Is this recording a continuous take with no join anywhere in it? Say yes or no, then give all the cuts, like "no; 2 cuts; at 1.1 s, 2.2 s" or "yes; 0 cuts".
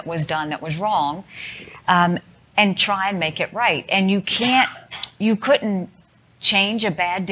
yes; 0 cuts